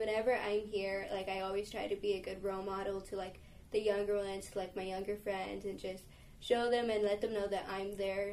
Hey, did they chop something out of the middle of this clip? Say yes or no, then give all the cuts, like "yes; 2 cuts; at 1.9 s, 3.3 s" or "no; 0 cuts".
no; 0 cuts